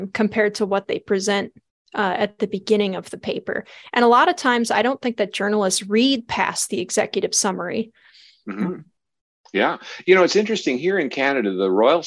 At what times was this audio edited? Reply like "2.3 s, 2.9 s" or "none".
none